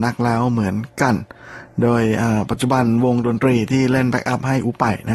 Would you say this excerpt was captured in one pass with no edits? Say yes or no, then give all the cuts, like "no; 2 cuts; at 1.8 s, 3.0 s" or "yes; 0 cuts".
yes; 0 cuts